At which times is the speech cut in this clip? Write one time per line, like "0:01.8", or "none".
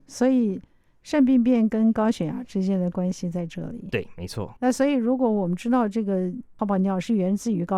0:04.6